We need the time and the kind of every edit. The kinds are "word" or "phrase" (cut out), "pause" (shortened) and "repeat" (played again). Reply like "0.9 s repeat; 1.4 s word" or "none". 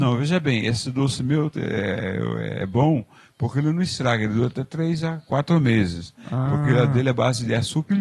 none

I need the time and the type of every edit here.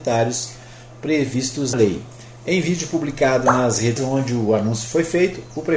1.7 s word; 4.0 s word

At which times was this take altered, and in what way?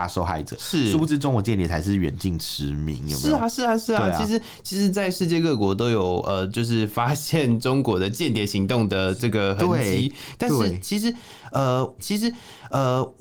12.0 s repeat

